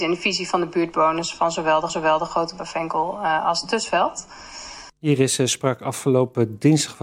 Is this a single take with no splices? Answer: no; 2 cuts; at 1.9 s, 4.9 s

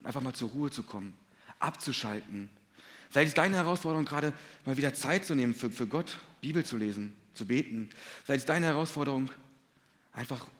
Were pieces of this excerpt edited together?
yes; 1 cut; at 5.7 s

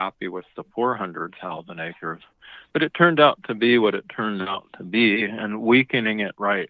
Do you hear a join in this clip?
no; 0 cuts

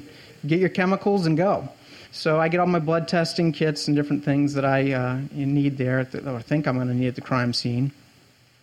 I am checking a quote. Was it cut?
yes; 1 cut; at 2.1 s

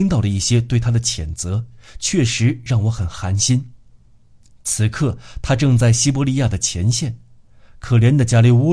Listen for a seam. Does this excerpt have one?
no; 0 cuts

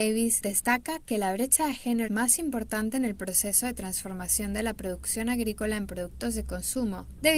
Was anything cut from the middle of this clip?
yes; 1 cut; at 2.1 s

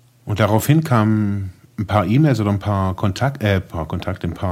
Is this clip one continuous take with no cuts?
yes; 0 cuts

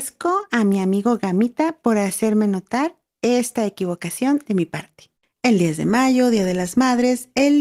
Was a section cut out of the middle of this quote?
no; 0 cuts

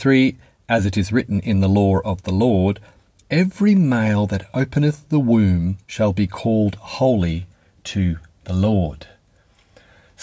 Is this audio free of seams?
no; 1 cut; at 5.8 s

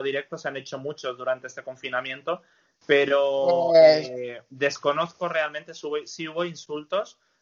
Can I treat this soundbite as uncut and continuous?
yes; 0 cuts

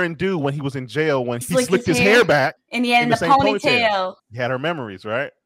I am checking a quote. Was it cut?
yes; 3 cuts; at 1.4 s, 2.6 s, 4.2 s

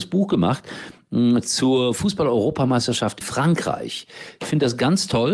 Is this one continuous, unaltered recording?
no; 1 cut; at 3.2 s

